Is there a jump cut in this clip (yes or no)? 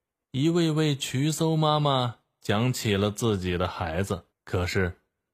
yes